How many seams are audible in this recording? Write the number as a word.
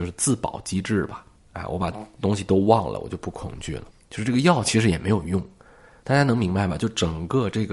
one